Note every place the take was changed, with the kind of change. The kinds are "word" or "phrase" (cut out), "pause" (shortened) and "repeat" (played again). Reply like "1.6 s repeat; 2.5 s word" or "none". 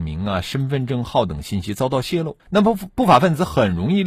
2.4 s pause